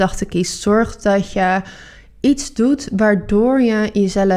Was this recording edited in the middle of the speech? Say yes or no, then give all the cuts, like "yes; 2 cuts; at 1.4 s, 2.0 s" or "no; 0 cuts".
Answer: no; 0 cuts